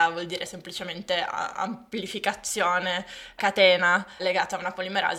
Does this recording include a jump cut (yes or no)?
yes